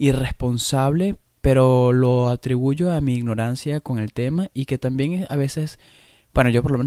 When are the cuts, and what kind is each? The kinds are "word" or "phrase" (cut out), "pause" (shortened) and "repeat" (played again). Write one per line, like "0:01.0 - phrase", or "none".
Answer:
none